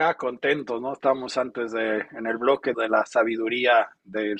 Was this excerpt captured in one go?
no; 1 cut; at 2.7 s

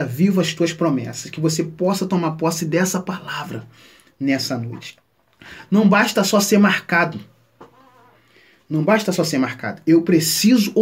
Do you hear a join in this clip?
no; 0 cuts

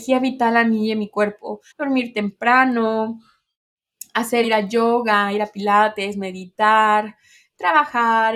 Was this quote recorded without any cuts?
no; 2 cuts; at 1.7 s, 4.4 s

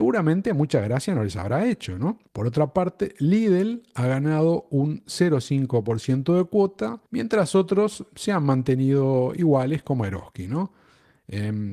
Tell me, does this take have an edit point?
yes; 2 cuts; at 2.3 s, 7.1 s

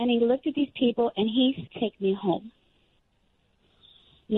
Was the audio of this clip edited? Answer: yes; 1 cut; at 1.7 s

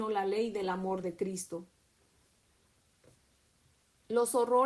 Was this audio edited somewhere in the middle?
no; 0 cuts

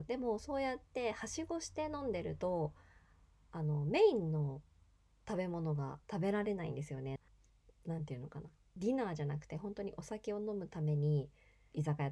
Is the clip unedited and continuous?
yes; 0 cuts

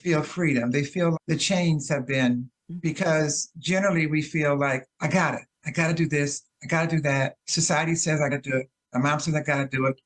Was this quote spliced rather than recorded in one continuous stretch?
yes; 5 cuts; at 1.1 s, 2.6 s, 4.9 s, 7.4 s, 8.3 s

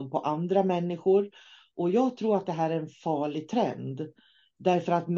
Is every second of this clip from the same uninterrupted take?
yes; 0 cuts

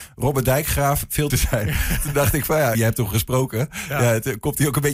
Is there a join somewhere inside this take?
yes; 2 cuts; at 1.3 s, 2.7 s

